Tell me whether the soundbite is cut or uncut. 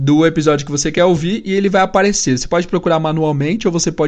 uncut